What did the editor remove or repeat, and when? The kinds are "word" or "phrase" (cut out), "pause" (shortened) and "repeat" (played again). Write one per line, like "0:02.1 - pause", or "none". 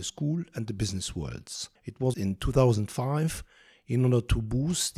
0:01.8 - pause
0:02.1 - phrase

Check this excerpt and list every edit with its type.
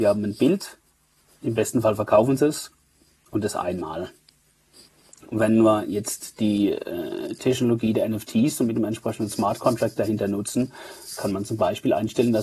none

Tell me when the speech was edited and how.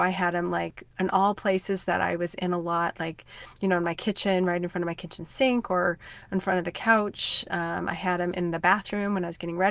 none

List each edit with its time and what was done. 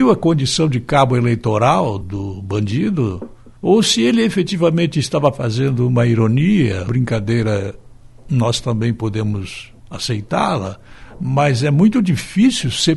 0:02.0 - word
0:03.6 - pause
0:06.9 - phrase
0:09.8 - pause

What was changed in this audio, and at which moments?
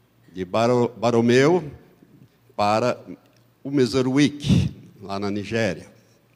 none

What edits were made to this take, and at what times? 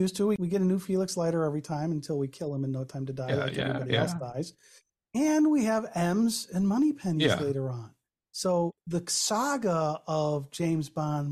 none

